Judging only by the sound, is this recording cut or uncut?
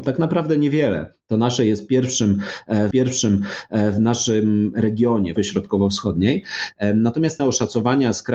cut